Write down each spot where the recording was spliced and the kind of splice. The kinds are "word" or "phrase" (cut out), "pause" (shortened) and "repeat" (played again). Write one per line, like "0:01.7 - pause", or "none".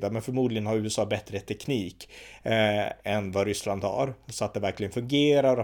none